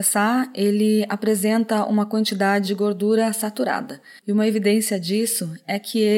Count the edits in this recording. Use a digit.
1